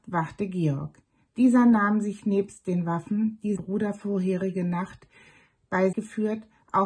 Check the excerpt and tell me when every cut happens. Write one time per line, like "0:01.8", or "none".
0:03.6
0:05.9